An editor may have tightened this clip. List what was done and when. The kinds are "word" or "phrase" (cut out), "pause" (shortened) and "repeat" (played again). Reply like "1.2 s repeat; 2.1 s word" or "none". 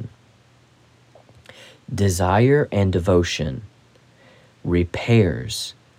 none

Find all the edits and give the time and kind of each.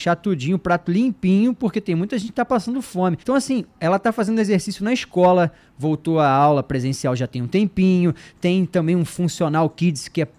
3.2 s pause

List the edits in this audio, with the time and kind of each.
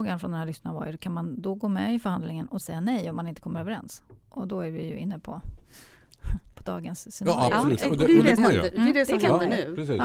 2.6 s word; 4.2 s pause; 8.4 s word

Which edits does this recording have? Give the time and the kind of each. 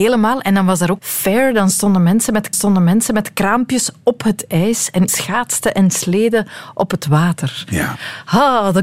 1.0 s phrase; 2.5 s repeat; 5.1 s word

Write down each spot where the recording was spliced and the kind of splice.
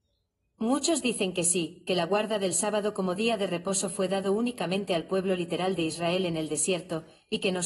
none

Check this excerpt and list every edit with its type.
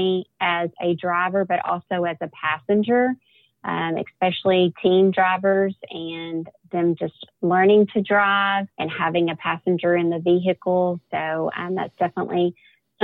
7.3 s pause; 8.7 s pause

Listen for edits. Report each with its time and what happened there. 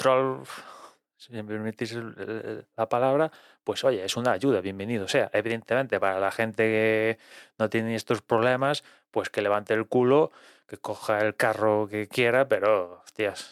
none

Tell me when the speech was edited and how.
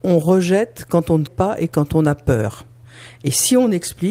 1.3 s word

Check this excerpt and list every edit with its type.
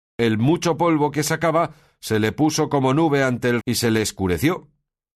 3.6 s word

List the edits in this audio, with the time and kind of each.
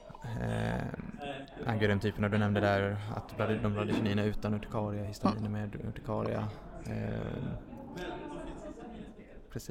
none

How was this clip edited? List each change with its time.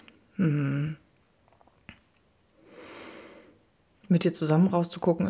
none

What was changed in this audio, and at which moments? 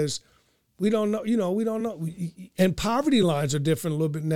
none

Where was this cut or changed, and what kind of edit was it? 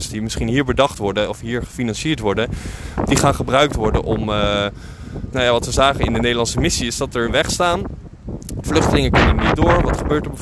5.3 s word; 7.3 s phrase

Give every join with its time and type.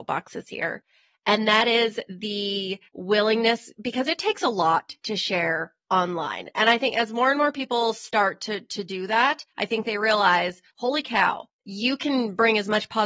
2.9 s pause; 9.5 s pause; 10.7 s pause; 11.5 s pause

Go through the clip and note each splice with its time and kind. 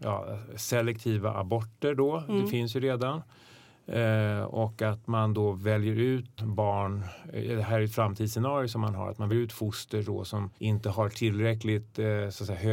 6.4 s word; 9.3 s word; 10.6 s pause

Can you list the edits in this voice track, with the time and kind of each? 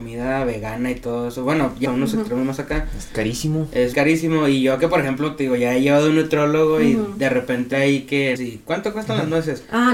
1.8 s word; 3.9 s word; 7.7 s word; 8.4 s word

